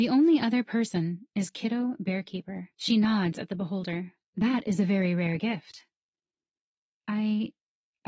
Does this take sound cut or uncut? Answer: cut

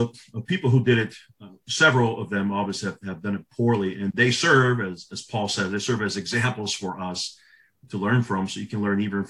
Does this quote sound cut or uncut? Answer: uncut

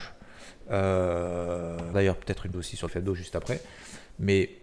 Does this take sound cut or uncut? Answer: cut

